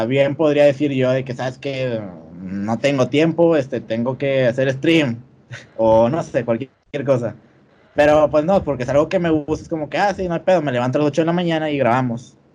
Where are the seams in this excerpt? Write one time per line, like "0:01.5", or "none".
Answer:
none